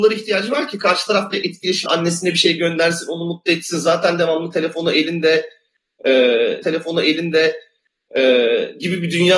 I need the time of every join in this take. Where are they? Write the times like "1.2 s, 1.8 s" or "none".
1.9 s, 6.6 s